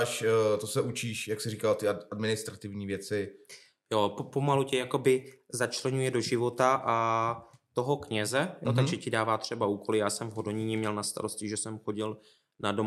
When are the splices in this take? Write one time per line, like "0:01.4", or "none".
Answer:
none